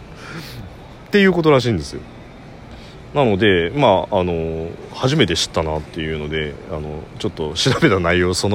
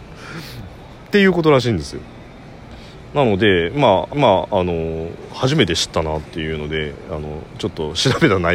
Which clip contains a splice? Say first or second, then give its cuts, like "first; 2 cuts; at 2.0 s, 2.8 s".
second; 1 cut; at 4.1 s